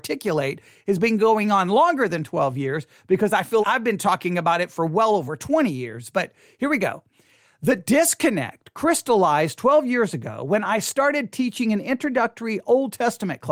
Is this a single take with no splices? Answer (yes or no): no